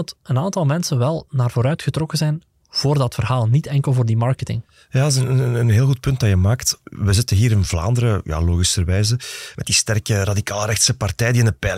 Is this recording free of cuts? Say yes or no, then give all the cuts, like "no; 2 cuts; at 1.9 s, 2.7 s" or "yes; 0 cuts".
yes; 0 cuts